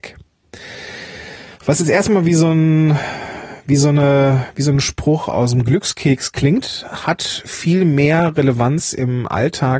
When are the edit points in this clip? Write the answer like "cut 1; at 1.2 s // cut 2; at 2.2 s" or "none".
none